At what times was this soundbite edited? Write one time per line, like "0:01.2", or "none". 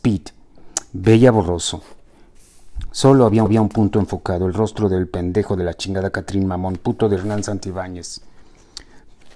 0:03.5
0:05.5